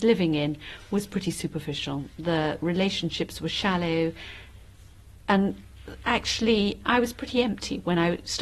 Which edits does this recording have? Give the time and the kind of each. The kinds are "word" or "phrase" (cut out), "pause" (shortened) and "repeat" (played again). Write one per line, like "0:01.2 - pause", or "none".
none